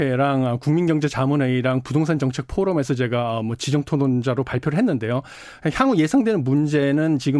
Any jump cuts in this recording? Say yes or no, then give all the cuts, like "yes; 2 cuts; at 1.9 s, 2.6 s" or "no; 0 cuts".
no; 0 cuts